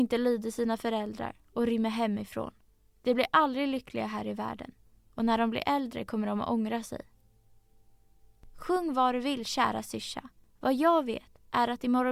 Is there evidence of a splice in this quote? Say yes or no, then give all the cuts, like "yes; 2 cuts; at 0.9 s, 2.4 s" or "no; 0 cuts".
no; 0 cuts